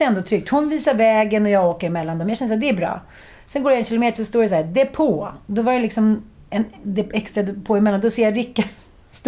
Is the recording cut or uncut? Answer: uncut